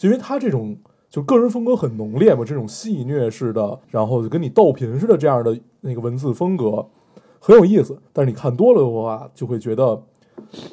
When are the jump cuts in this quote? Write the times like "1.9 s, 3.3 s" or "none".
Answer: 3.8 s, 8.1 s

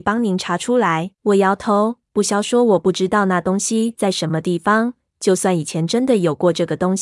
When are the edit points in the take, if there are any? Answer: 1.1 s

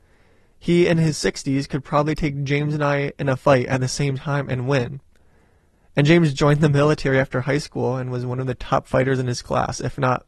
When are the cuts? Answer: none

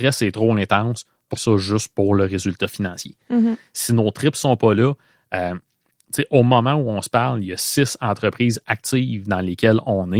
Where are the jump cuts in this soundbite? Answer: 1.4 s

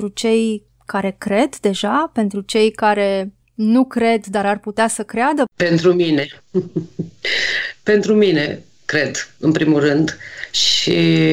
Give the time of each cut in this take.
none

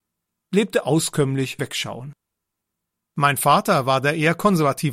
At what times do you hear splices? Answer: 1.6 s

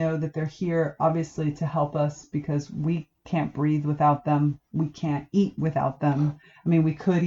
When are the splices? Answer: none

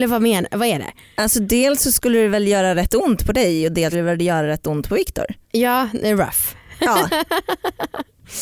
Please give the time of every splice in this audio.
3.9 s, 5.4 s

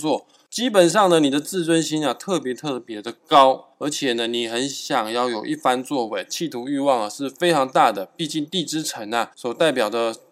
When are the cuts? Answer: 3.7 s, 9.3 s

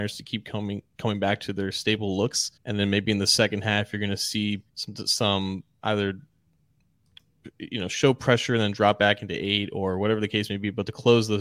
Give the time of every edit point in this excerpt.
2.6 s, 4.7 s

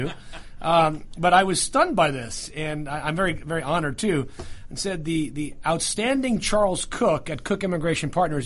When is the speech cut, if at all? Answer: none

